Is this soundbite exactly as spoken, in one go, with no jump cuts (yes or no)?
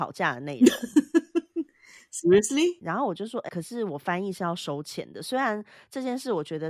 no